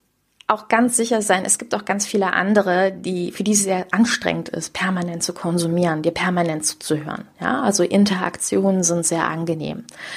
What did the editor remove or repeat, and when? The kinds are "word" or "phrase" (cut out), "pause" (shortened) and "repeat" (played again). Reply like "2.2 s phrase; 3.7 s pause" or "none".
none

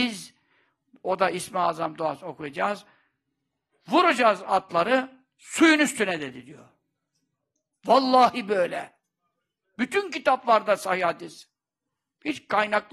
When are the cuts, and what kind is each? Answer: none

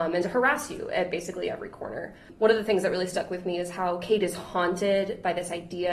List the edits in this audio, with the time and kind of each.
none

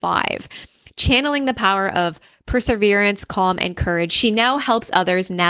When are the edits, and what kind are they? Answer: none

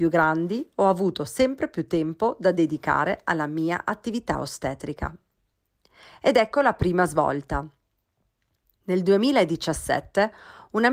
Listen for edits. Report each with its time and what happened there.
none

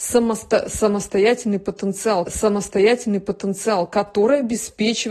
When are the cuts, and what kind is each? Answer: 2.3 s repeat

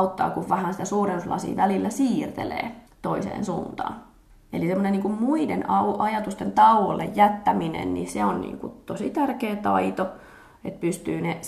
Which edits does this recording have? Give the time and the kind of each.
2.9 s pause; 4.3 s pause

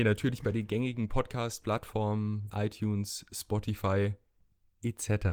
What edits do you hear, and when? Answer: 2.5 s word

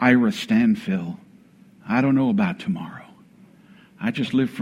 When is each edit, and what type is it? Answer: none

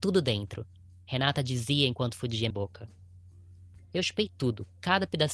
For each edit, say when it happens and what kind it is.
2.5 s word

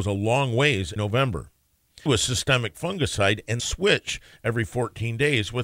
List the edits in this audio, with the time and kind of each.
1.0 s word; 2.1 s word; 3.6 s word

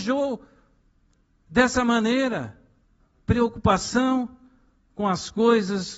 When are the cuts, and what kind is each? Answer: none

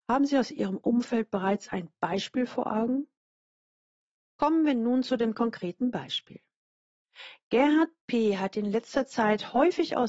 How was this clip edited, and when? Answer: none

